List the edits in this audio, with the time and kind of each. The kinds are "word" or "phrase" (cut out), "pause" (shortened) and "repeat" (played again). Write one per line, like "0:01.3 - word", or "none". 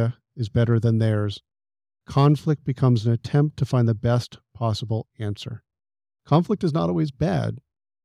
none